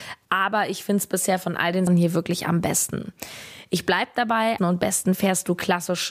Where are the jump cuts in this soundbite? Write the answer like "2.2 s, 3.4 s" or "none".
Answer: 1.9 s, 4.6 s

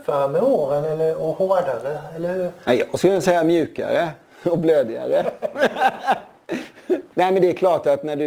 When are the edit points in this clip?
none

